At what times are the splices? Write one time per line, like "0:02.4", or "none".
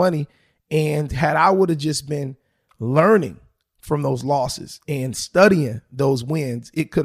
none